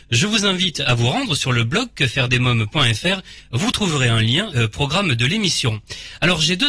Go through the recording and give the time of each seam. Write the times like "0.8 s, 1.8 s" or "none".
4.5 s